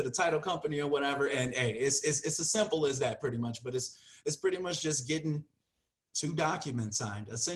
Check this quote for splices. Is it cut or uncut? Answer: uncut